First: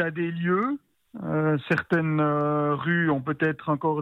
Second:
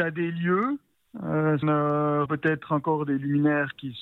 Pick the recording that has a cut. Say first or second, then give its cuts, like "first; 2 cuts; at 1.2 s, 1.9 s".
second; 2 cuts; at 1.6 s, 2.3 s